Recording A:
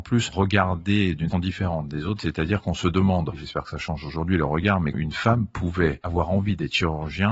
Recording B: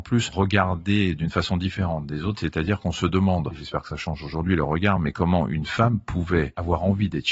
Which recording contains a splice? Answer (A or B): A